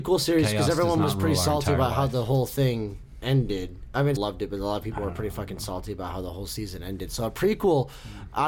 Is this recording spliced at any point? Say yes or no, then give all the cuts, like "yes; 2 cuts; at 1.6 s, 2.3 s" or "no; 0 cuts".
yes; 1 cut; at 4.2 s